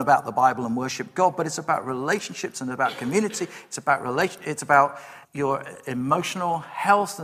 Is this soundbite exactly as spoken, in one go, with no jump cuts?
no; 1 cut; at 5.2 s

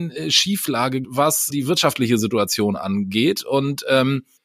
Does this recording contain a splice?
yes; 2 cuts; at 1.0 s, 1.5 s

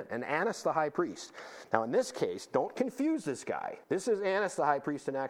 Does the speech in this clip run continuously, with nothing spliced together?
no; 1 cut; at 3.8 s

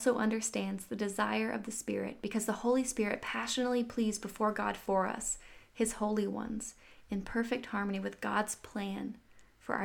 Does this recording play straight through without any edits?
yes; 0 cuts

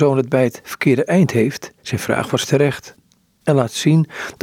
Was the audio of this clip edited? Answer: yes; 1 cut; at 1.8 s

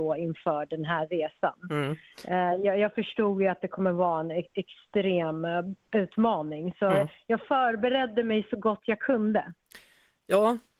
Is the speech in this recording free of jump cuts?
yes; 0 cuts

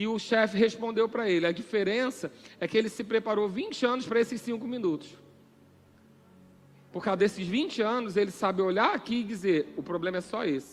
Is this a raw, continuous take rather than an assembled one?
yes; 0 cuts

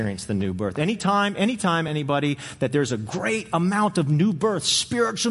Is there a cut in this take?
no; 0 cuts

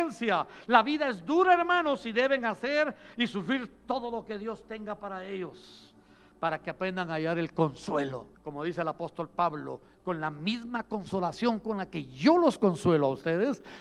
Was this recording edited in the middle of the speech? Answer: yes; 1 cut; at 8.3 s

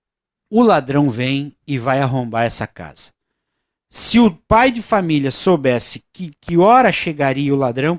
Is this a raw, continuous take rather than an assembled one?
yes; 0 cuts

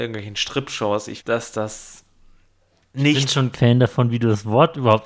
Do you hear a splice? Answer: yes; 2 cuts; at 1.2 s, 3.5 s

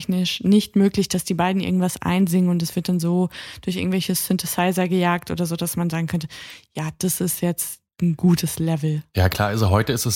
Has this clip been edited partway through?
no; 0 cuts

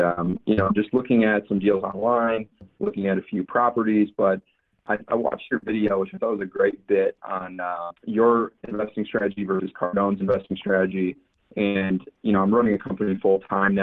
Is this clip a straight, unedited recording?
no; 1 cut; at 8.0 s

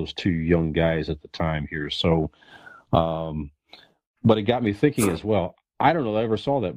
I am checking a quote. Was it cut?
no; 0 cuts

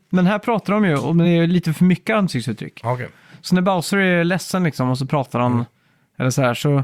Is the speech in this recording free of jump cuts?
yes; 0 cuts

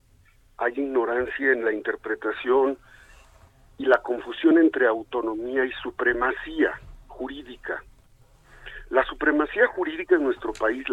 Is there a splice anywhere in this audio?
no; 0 cuts

